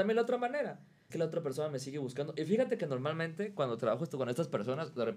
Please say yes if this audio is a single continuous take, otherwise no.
no